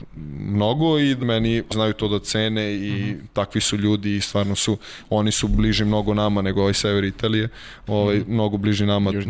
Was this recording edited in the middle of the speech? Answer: yes; 2 cuts; at 1.2 s, 1.7 s

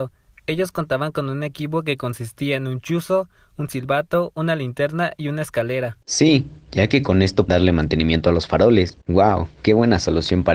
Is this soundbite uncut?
no; 3 cuts; at 6.0 s, 7.5 s, 9.0 s

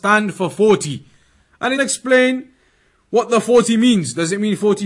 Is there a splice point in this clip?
yes; 1 cut; at 1.8 s

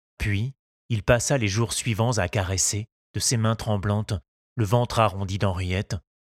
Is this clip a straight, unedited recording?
yes; 0 cuts

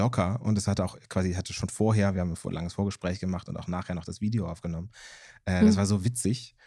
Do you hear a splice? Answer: no; 0 cuts

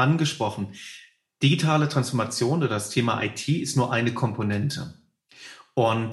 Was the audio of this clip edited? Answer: no; 0 cuts

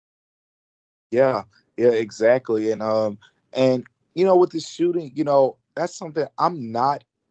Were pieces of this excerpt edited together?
no; 0 cuts

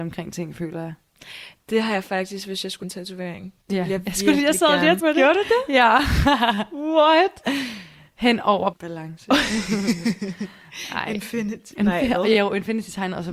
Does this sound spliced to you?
yes; 3 cuts; at 2.8 s, 5.0 s, 8.7 s

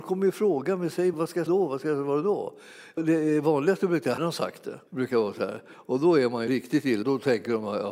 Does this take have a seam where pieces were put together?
yes; 7 cuts; at 1.1 s, 1.5 s, 3.0 s, 4.2 s, 4.9 s, 6.5 s, 7.0 s

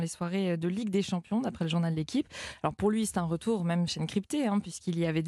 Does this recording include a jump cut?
yes; 1 cut; at 3.9 s

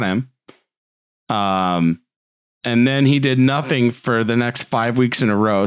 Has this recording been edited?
no; 0 cuts

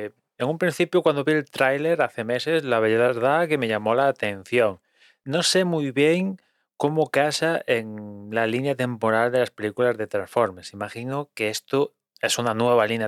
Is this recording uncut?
yes; 0 cuts

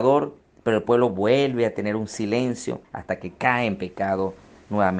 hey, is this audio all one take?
no; 1 cut; at 2.8 s

